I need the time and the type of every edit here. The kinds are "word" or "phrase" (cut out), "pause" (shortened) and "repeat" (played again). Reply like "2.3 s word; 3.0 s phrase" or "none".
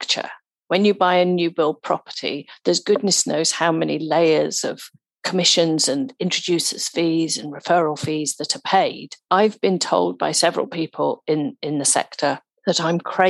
none